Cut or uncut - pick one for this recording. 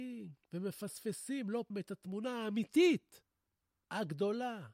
cut